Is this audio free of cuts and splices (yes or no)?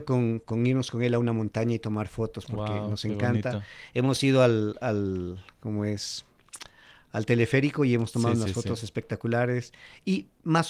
yes